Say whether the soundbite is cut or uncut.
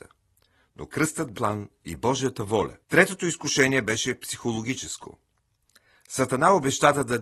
cut